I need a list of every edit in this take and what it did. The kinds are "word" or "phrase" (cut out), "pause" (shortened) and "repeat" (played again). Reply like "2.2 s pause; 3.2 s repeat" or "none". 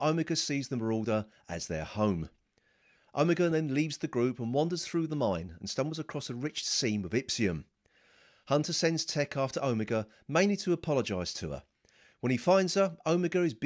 none